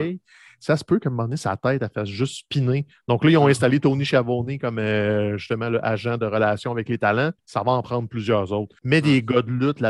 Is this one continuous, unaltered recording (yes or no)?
no